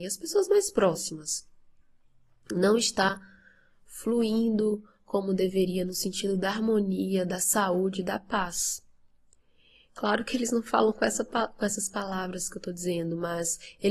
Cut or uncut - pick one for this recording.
uncut